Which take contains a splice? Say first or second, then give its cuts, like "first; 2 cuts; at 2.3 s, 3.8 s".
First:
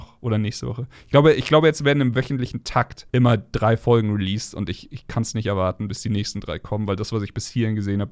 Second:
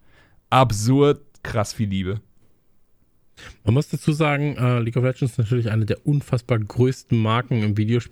first; 1 cut; at 3.1 s